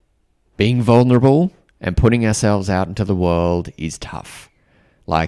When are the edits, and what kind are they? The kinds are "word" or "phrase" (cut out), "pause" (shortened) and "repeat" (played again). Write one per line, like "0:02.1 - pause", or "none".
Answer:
none